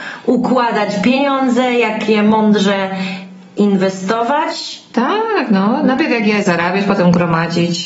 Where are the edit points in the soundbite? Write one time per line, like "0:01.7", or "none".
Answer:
none